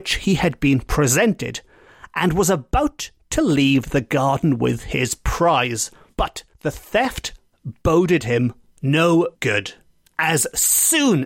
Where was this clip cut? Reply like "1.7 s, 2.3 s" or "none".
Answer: 6.5 s, 9.4 s